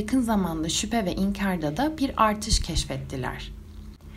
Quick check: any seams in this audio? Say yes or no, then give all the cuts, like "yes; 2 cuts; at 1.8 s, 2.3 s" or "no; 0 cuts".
no; 0 cuts